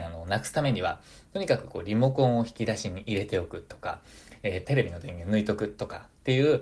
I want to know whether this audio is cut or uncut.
cut